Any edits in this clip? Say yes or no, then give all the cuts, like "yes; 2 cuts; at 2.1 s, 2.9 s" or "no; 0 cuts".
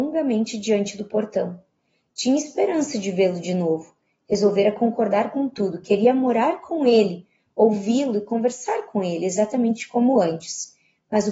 no; 0 cuts